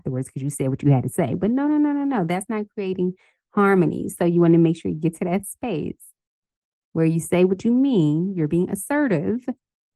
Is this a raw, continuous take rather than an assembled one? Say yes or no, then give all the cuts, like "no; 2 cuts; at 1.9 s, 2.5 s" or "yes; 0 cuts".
yes; 0 cuts